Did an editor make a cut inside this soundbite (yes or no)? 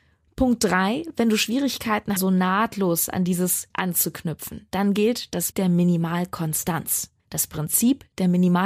yes